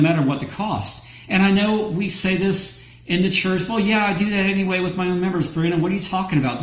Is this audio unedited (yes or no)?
yes